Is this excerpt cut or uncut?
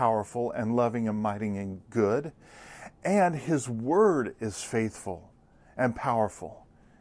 uncut